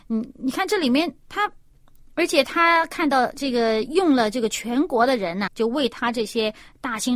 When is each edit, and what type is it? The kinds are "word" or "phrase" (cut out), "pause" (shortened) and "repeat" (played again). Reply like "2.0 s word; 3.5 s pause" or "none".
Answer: 1.2 s pause; 5.5 s word